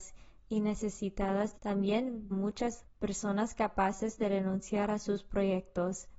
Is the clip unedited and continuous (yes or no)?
no